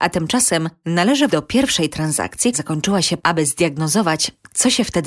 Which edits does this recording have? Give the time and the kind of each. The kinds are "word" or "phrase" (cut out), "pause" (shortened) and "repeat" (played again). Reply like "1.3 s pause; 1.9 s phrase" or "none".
1.3 s word; 2.5 s word; 3.2 s word